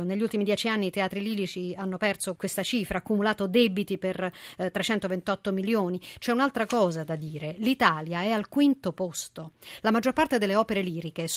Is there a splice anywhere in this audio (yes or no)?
yes